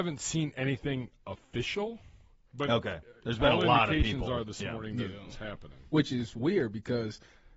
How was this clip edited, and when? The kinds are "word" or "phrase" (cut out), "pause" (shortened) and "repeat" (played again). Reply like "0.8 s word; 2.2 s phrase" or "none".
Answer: none